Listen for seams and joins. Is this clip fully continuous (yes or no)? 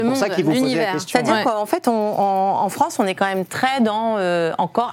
yes